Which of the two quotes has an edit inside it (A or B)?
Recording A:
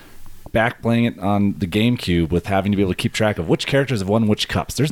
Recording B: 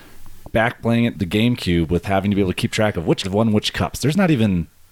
B